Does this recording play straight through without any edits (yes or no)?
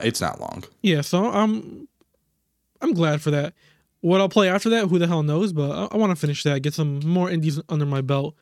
yes